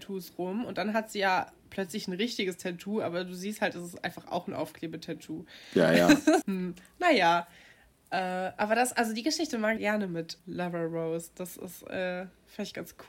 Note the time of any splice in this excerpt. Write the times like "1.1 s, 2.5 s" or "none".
6.4 s, 9.8 s, 10.4 s